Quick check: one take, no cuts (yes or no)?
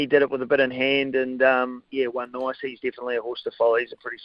yes